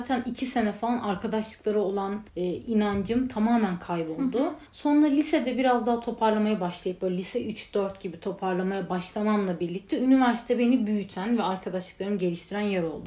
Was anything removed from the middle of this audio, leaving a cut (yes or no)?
yes